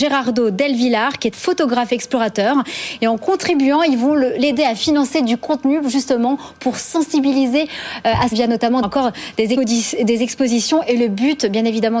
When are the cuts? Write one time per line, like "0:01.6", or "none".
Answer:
0:01.3
0:08.3
0:08.8
0:09.6